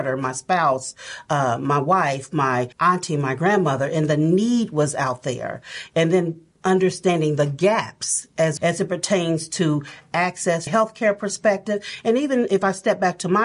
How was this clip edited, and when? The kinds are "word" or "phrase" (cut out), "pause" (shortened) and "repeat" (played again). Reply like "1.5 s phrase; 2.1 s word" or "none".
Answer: 2.7 s pause; 8.6 s word; 10.7 s phrase